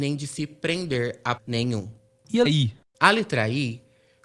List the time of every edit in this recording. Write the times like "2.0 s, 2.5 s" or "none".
1.4 s, 2.4 s